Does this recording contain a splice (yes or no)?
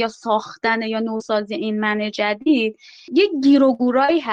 no